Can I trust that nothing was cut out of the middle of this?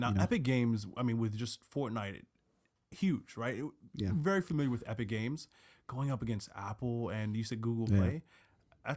yes; 0 cuts

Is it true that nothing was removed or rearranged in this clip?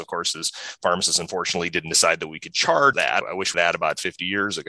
no; 2 cuts; at 2.9 s, 3.5 s

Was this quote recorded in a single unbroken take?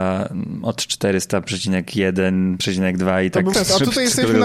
no; 1 cut; at 3.5 s

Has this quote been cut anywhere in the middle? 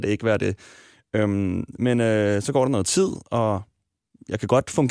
no; 0 cuts

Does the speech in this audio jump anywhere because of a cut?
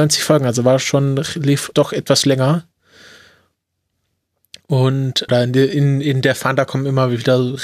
yes; 2 cuts; at 1.7 s, 5.3 s

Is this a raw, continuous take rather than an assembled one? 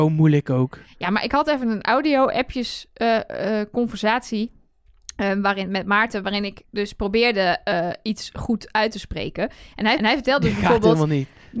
no; 1 cut; at 10.0 s

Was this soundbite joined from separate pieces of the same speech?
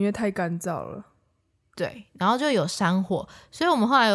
no; 0 cuts

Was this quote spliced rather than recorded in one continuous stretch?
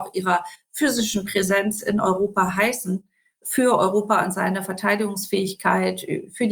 no; 0 cuts

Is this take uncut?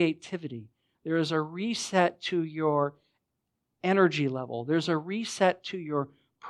yes; 0 cuts

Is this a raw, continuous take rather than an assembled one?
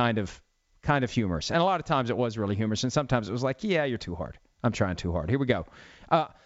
no; 1 cut; at 4.0 s

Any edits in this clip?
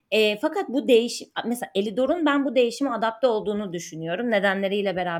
no; 0 cuts

